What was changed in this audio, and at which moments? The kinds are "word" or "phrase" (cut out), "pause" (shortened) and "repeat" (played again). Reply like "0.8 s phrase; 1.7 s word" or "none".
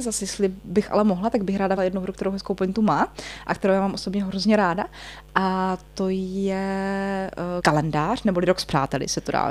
1.8 s word; 7.6 s word